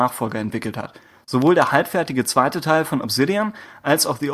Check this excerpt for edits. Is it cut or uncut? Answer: uncut